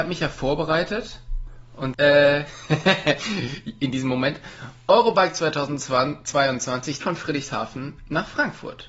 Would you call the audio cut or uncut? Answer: cut